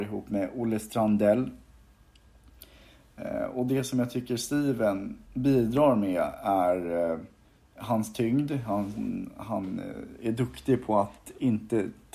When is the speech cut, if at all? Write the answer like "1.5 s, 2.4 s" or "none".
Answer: 5.2 s, 7.4 s